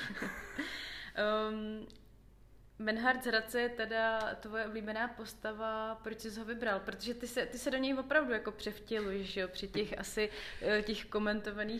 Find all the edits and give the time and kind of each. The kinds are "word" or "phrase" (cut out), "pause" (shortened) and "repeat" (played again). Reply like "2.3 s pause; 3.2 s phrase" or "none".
none